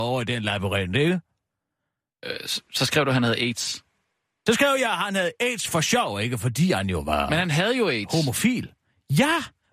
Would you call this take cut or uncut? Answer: uncut